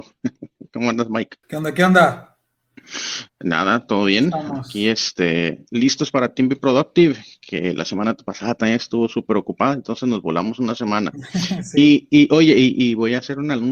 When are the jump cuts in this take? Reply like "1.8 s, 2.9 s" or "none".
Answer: 1.4 s, 3.3 s

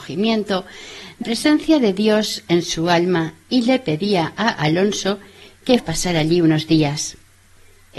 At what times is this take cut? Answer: 1.2 s, 5.8 s

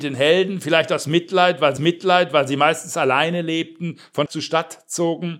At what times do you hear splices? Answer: 1.8 s, 4.3 s

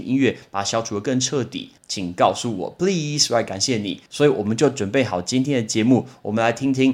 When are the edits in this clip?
1.8 s, 4.1 s

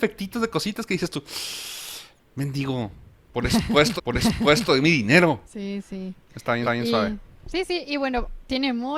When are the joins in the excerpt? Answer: 4.0 s, 5.4 s, 6.6 s

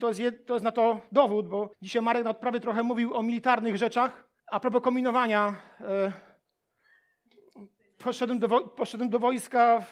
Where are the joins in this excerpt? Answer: 1.7 s, 4.4 s, 7.8 s

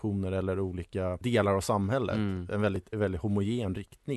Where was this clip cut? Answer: 2.9 s

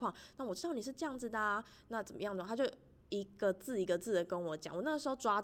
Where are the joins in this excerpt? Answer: none

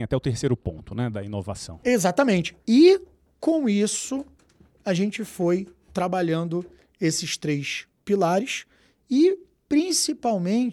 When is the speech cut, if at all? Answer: none

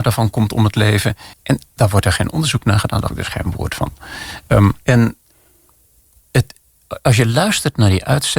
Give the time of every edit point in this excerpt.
1.3 s, 3.1 s, 4.8 s

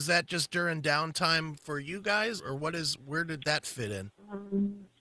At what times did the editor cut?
1.6 s, 2.4 s

